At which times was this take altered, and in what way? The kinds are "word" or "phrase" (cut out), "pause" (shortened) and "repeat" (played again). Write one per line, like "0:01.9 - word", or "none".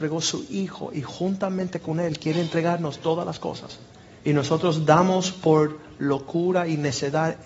0:04.2 - pause